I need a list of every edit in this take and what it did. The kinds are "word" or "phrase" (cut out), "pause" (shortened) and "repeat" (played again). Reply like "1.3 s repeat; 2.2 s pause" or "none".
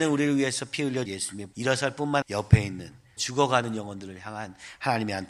1.1 s word; 1.5 s phrase; 2.2 s word; 3.2 s word